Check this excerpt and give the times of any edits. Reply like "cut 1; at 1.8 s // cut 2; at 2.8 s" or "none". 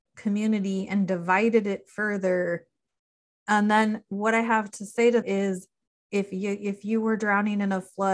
cut 1; at 3.2 s // cut 2; at 5.2 s